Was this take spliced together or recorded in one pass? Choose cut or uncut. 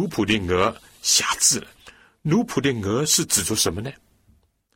cut